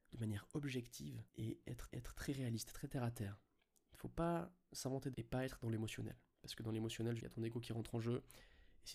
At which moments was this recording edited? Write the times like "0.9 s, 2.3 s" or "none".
1.3 s, 1.9 s, 5.1 s, 7.2 s

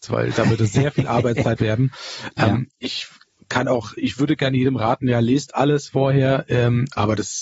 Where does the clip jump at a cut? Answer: 1.6 s, 4.0 s

